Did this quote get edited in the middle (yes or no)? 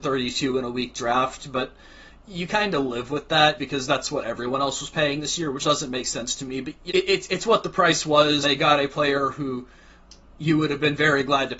yes